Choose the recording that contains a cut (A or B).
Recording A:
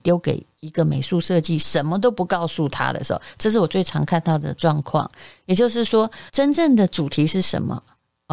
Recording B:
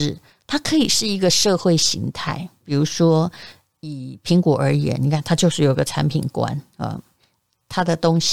A